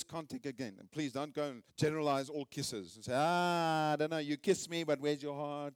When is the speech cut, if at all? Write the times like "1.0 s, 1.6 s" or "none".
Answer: 1.7 s